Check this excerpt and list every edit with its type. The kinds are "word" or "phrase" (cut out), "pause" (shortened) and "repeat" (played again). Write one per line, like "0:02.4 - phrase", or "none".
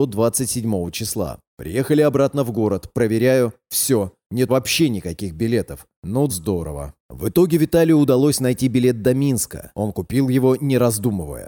0:04.5 - word
0:06.3 - word
0:07.0 - pause